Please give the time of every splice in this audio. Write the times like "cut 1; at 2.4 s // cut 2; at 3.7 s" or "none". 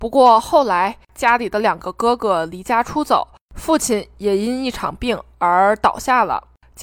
none